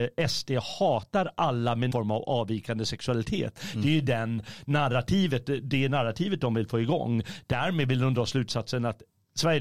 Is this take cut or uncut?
cut